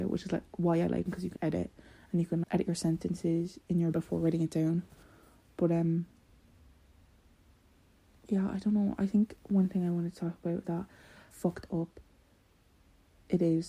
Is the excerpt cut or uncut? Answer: cut